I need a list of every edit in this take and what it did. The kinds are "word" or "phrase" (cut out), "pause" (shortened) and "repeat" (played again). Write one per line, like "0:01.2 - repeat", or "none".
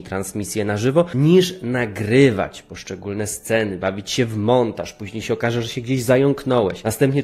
none